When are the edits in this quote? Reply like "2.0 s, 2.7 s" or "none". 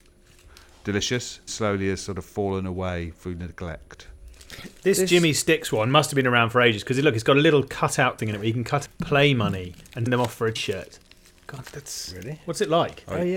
1.5 s, 8.2 s, 8.9 s, 10.1 s, 10.6 s, 11.6 s